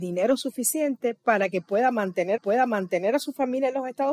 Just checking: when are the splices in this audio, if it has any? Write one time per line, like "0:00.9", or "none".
0:02.4

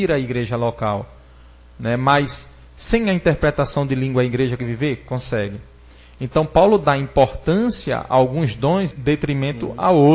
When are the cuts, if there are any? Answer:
0:04.6
0:08.9

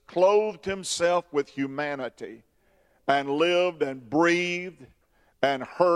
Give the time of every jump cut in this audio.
none

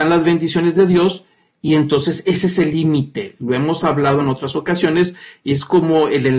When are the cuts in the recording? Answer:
none

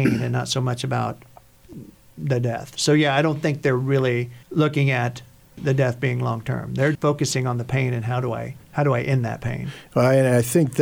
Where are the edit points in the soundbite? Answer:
0:04.4
0:06.9
0:08.6

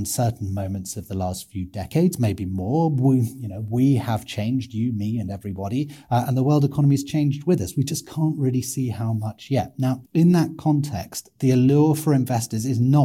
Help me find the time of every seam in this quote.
0:10.1

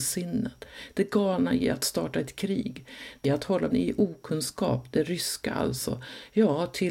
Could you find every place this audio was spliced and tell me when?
0:03.2
0:03.7

